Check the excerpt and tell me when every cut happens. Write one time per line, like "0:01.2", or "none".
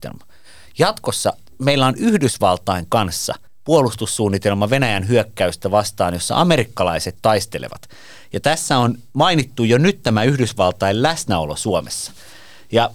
0:01.5
0:03.5
0:07.2